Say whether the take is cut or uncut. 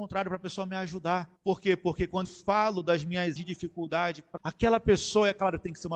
cut